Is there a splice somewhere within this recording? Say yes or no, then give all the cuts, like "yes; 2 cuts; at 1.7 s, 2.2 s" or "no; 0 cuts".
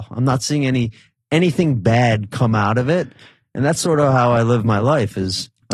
no; 0 cuts